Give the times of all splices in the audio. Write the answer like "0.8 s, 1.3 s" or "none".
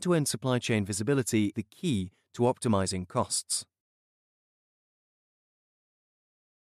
1.5 s